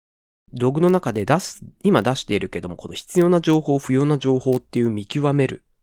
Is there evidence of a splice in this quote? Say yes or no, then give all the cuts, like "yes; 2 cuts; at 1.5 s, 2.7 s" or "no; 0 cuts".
yes; 1 cut; at 1.8 s